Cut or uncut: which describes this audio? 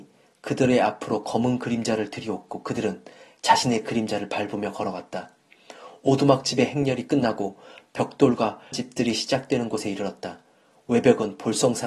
cut